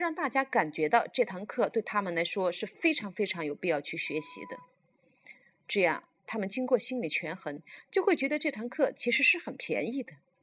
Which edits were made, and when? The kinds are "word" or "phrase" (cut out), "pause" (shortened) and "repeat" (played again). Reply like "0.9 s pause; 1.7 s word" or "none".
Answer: none